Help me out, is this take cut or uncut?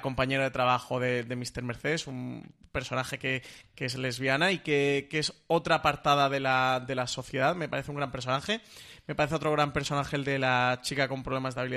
uncut